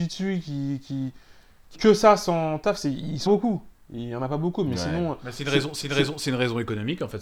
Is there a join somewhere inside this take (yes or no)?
yes